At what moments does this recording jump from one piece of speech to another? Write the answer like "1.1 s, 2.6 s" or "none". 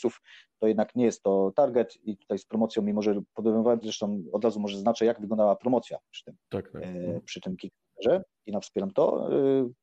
3.8 s, 6.4 s